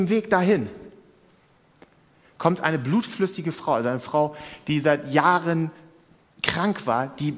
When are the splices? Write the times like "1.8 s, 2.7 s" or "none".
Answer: none